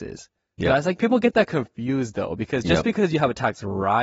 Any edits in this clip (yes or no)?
no